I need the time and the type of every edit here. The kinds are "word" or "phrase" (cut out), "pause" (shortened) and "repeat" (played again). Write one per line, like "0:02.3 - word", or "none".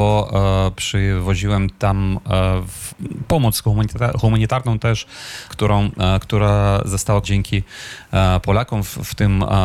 0:02.9 - word
0:05.5 - word
0:07.2 - word